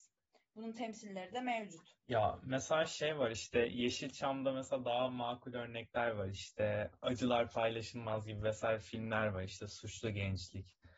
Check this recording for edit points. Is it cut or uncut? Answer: uncut